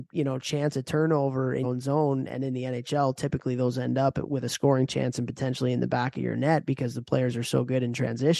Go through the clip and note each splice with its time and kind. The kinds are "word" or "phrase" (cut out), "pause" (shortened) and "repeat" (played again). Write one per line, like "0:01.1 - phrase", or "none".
0:01.6 - word